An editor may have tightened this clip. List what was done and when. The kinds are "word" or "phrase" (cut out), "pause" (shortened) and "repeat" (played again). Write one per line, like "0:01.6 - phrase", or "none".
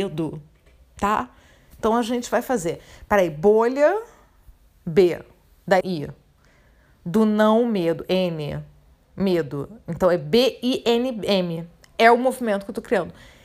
0:05.8 - word